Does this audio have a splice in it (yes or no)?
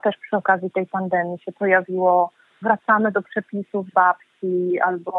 no